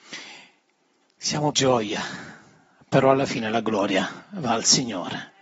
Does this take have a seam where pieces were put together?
yes; 1 cut; at 1.5 s

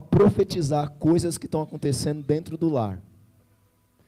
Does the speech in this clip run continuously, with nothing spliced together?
yes; 0 cuts

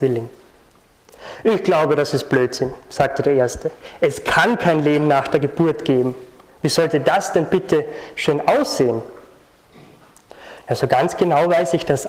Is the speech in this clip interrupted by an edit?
no; 0 cuts

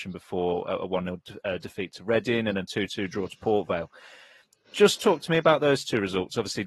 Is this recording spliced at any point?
no; 0 cuts

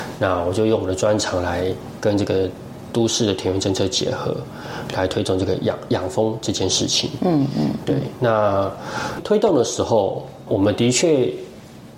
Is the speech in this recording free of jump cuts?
no; 1 cut; at 10.5 s

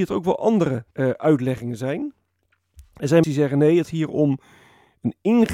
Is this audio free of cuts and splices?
no; 3 cuts; at 0.9 s, 3.2 s, 3.9 s

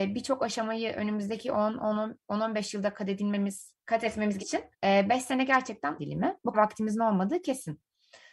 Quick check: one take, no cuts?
no; 5 cuts; at 3.8 s, 4.4 s, 4.7 s, 6.0 s, 6.5 s

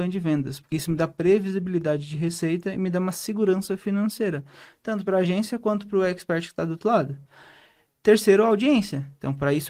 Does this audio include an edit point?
no; 0 cuts

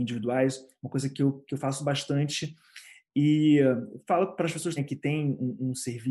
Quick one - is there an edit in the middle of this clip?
yes; 1 cut; at 4.8 s

